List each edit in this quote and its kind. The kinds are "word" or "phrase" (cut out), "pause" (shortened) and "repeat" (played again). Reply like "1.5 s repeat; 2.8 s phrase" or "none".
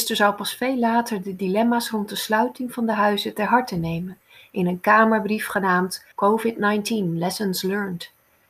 6.1 s pause